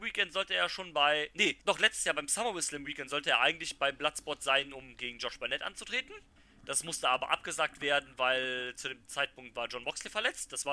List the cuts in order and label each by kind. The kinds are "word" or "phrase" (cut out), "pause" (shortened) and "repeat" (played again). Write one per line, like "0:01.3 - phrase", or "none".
0:01.6 - pause
0:06.4 - pause